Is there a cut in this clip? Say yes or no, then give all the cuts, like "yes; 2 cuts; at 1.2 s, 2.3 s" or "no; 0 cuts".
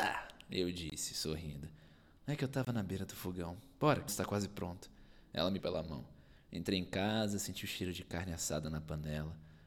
yes; 2 cuts; at 4.1 s, 5.6 s